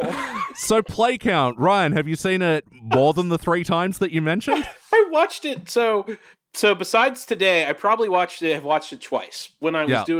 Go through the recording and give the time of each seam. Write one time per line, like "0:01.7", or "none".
none